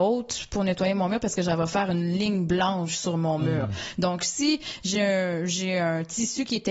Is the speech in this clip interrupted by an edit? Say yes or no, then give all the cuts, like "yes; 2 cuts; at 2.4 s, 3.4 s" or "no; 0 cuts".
no; 0 cuts